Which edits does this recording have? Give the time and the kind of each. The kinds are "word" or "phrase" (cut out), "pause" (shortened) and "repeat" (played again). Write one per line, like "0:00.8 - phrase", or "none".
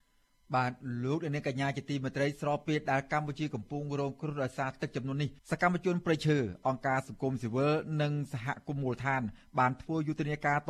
0:05.4 - pause